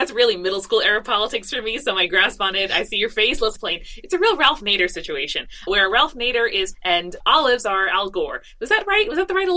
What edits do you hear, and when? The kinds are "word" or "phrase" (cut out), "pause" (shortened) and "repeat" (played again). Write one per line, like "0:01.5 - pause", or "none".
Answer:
0:03.6 - phrase
0:05.7 - word
0:06.7 - word
0:07.2 - word